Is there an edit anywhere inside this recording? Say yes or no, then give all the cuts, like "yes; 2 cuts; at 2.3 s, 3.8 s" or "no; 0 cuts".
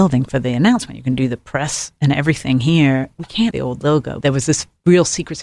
yes; 2 cuts; at 3.5 s, 4.2 s